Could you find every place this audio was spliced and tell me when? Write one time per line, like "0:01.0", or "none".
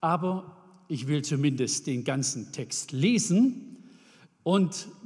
none

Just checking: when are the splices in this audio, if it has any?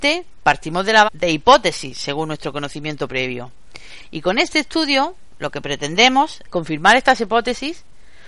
0:01.0
0:06.5

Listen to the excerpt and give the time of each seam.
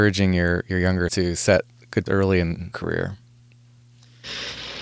0:01.1
0:02.1
0:02.7

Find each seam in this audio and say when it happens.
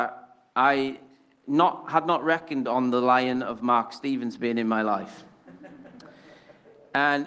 none

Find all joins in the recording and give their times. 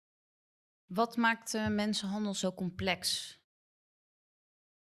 none

